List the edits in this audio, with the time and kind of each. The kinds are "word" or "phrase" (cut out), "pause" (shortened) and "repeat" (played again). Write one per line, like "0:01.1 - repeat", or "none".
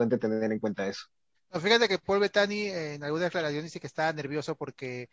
0:01.3 - pause